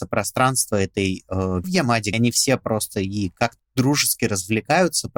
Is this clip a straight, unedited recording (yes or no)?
no